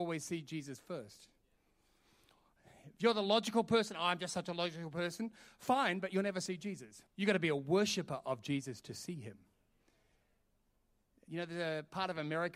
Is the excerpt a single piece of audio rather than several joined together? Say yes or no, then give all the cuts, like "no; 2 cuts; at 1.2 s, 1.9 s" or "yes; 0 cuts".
no; 1 cut; at 7.1 s